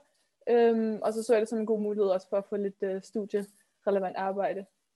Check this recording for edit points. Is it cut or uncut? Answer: uncut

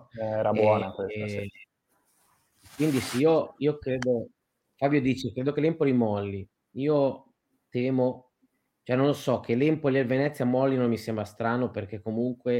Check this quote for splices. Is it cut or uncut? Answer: uncut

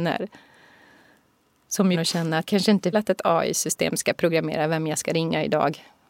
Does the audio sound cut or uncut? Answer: cut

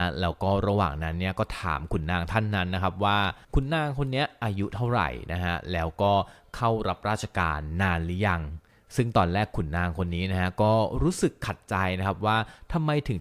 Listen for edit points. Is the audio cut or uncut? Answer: cut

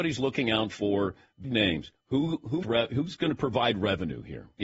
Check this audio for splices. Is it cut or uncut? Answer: cut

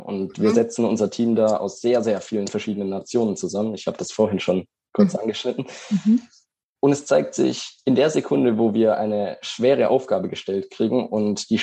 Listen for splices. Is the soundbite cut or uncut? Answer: uncut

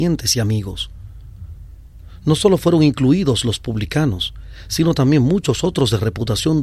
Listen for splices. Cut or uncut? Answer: uncut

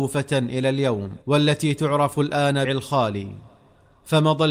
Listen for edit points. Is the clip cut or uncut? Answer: cut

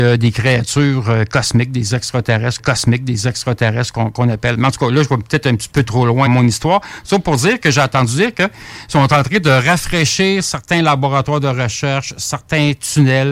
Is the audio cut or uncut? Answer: cut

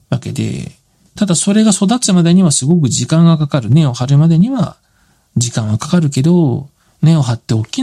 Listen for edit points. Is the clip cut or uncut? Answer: uncut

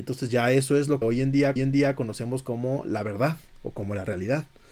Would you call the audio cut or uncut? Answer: cut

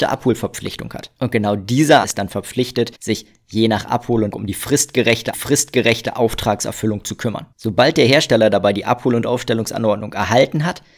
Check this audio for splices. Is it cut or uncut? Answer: cut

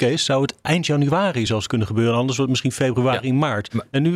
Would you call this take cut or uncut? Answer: uncut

